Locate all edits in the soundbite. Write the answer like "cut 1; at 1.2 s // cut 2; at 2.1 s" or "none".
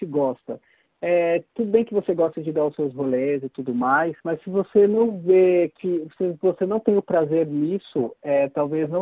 cut 1; at 4.2 s